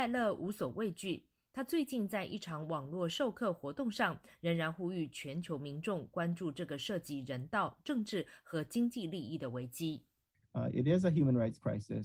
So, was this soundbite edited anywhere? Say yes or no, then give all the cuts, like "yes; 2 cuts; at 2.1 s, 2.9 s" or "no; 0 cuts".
no; 0 cuts